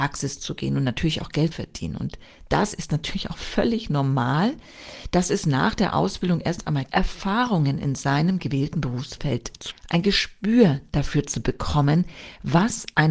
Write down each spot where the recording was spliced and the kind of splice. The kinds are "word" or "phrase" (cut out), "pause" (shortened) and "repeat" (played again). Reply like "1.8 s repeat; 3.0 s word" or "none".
1.5 s word; 6.9 s word; 9.7 s word